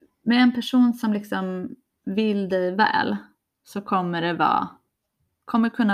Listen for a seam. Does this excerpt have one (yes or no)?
no